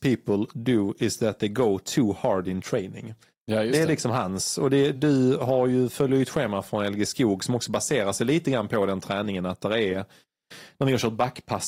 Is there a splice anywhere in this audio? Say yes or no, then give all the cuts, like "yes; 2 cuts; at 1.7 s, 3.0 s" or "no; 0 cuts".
no; 0 cuts